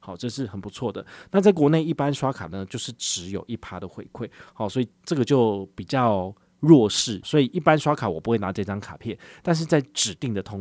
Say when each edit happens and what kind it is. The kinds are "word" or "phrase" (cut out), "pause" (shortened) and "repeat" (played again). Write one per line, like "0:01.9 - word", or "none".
0:07.2 - word